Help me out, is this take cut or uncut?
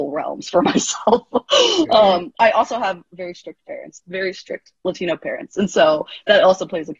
uncut